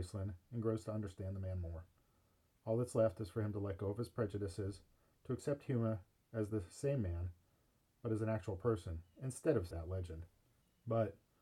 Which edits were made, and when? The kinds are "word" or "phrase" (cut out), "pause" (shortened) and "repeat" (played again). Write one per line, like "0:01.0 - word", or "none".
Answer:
0:09.7 - word